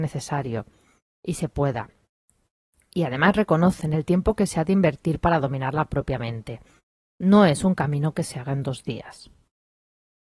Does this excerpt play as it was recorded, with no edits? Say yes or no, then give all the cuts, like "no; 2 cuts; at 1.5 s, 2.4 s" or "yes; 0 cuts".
yes; 0 cuts